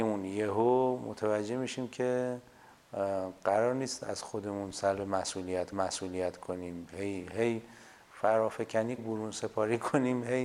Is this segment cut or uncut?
cut